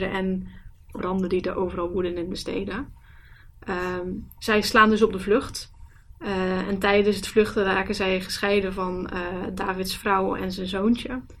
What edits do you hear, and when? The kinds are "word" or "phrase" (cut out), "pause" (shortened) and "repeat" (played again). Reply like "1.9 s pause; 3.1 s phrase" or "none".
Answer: none